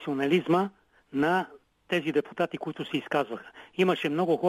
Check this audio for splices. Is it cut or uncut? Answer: uncut